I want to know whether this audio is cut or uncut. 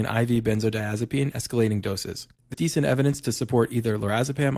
cut